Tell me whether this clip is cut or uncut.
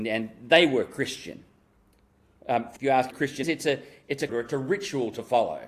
cut